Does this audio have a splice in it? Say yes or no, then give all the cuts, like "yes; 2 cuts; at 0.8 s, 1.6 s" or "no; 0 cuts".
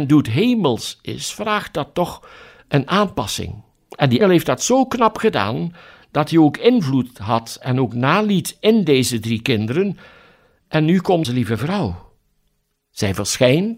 yes; 2 cuts; at 4.2 s, 11.2 s